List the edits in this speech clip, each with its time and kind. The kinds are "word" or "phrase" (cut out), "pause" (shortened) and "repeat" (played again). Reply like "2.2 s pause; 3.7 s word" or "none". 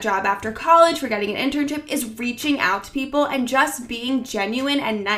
none

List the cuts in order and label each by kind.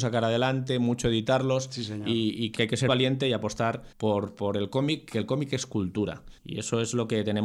2.6 s word; 2.9 s word; 3.9 s pause; 6.4 s pause

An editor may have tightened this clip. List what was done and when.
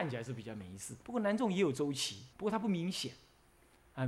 1.0 s pause; 2.3 s pause

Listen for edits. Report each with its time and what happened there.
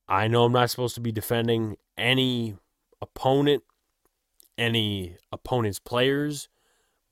none

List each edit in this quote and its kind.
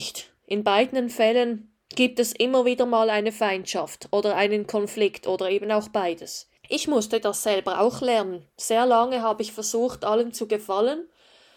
1.8 s pause; 6.6 s pause

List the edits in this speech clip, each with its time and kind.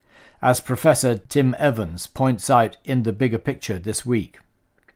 none

